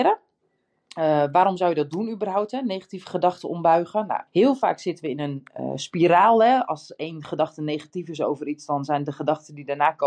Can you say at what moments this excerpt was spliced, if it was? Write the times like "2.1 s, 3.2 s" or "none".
4.3 s